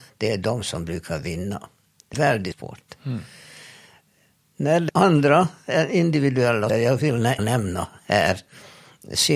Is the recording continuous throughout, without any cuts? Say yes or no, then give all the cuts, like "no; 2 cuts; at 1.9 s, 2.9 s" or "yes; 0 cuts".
no; 5 cuts; at 2.1 s, 2.5 s, 4.9 s, 6.7 s, 7.4 s